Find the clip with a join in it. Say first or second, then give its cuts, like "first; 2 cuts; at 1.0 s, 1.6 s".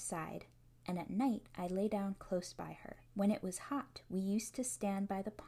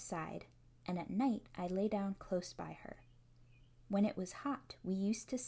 first; 1 cut; at 3.0 s